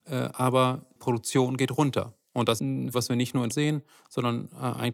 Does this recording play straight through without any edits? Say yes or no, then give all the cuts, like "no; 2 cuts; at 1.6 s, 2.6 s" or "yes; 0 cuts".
no; 4 cuts; at 1.0 s, 2.6 s, 2.9 s, 3.5 s